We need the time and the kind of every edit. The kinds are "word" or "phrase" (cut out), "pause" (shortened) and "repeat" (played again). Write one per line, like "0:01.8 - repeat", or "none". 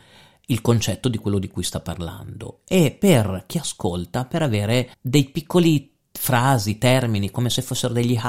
0:04.9 - pause